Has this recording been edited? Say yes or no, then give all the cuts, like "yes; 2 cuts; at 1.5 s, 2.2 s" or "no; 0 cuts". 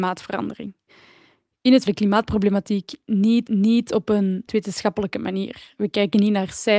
yes; 3 cuts; at 1.9 s, 3.5 s, 4.5 s